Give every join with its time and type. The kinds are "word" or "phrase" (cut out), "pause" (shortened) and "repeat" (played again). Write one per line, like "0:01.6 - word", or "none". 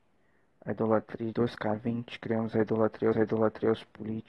0:01.3 - word
0:03.1 - repeat